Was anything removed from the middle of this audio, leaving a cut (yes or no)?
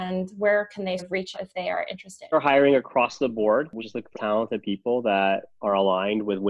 yes